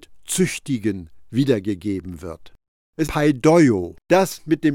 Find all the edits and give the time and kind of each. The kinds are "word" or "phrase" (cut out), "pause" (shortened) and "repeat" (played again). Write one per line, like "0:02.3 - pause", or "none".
0:03.1 - phrase